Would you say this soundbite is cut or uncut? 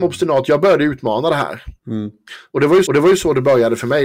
cut